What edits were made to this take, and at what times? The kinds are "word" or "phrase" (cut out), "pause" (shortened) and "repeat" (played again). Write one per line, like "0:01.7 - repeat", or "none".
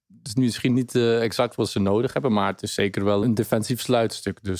0:03.2 - word

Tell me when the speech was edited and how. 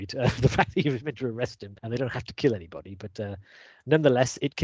0:01.8 - pause

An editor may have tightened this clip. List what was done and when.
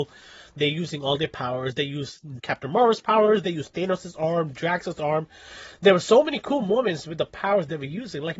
0:02.4 - word

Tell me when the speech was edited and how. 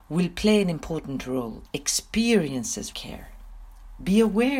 0:01.7 - word
0:02.9 - word

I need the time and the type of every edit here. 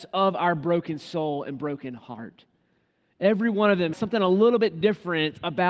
0:03.9 - word

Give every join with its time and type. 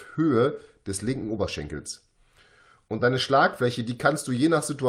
none

